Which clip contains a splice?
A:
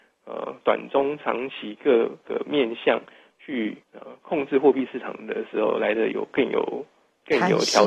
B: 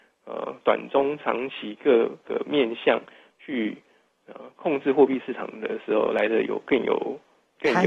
A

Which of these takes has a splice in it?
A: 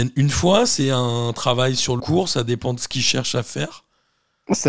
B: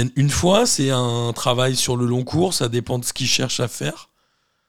A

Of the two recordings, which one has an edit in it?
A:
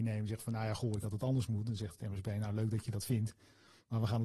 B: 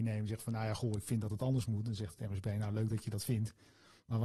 A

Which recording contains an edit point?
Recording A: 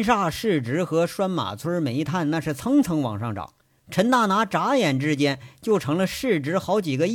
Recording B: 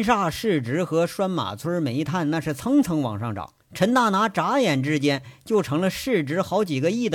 B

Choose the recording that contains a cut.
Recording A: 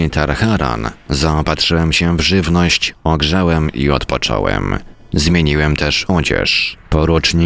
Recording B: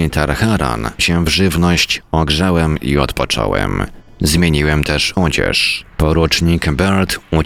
B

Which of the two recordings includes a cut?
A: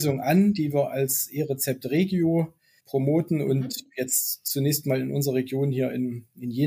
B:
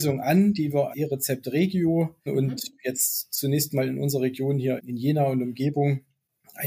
B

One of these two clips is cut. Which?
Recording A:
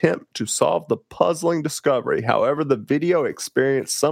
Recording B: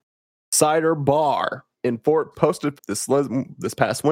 B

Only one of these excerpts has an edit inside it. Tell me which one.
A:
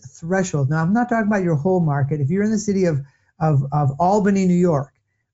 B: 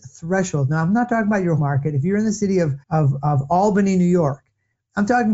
B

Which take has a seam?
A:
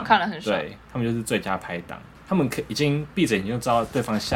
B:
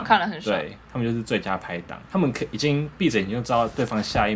B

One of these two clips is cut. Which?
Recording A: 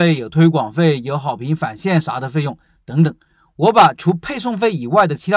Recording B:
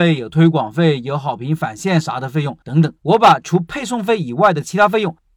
B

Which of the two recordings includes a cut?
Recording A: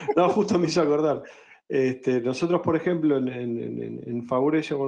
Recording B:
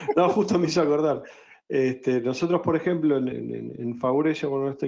B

